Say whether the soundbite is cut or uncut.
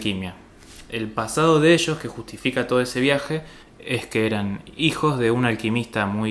uncut